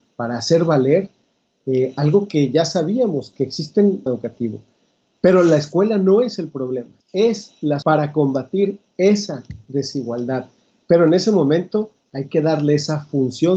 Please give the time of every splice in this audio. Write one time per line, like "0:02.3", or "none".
0:04.1
0:07.0
0:07.8